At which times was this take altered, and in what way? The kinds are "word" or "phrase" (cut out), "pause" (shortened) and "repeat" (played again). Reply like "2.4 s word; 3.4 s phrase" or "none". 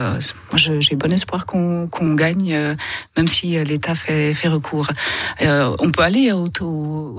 none